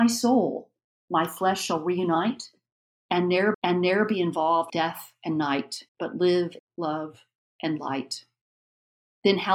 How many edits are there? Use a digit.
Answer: 4